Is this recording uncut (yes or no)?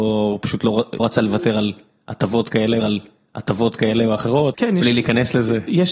no